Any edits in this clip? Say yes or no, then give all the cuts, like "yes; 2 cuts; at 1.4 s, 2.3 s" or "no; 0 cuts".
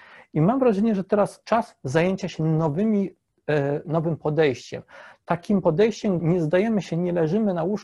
yes; 3 cuts; at 1.4 s, 3.8 s, 6.2 s